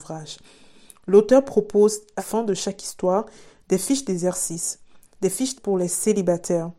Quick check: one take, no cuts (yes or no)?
no